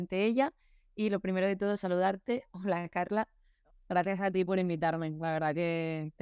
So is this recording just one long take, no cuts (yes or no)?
yes